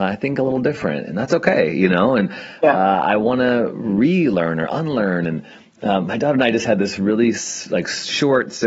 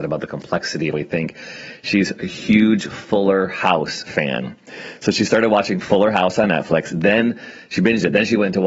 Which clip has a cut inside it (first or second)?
second